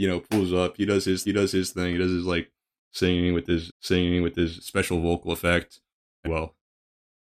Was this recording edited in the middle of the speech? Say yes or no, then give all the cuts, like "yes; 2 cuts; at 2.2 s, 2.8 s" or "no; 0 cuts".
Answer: yes; 3 cuts; at 1.2 s, 3.7 s, 6.3 s